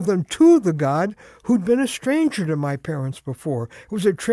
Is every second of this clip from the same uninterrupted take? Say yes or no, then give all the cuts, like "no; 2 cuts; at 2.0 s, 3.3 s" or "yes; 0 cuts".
yes; 0 cuts